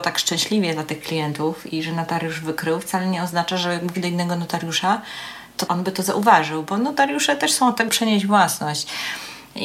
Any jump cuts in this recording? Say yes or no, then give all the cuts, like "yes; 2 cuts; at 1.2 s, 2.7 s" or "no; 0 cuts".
yes; 4 cuts; at 1.7 s, 3.9 s, 5.7 s, 7.9 s